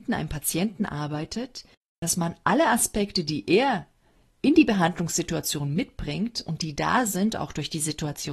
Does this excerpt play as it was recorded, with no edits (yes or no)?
yes